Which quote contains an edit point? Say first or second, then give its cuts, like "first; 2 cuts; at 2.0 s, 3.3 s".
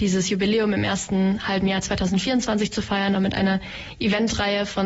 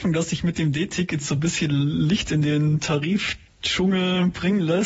first; 1 cut; at 3.2 s